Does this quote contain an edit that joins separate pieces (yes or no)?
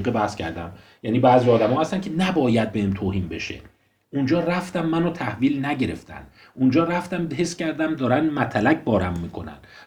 no